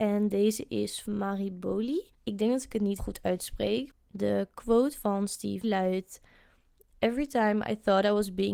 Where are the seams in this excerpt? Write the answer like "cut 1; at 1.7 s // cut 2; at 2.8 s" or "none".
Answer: cut 1; at 1.0 s // cut 2; at 2.1 s // cut 3; at 3.0 s // cut 4; at 5.6 s